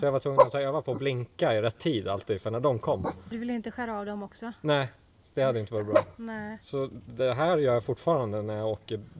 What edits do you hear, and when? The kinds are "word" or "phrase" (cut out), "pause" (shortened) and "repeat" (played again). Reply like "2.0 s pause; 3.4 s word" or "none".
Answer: 3.3 s word